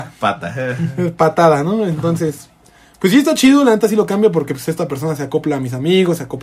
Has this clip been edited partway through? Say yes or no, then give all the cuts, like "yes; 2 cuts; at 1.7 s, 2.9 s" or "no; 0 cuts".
no; 0 cuts